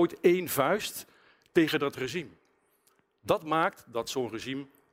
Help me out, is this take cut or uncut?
uncut